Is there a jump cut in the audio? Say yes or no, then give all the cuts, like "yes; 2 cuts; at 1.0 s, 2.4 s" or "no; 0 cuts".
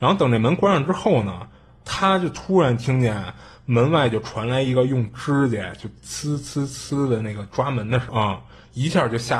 yes; 1 cut; at 8.1 s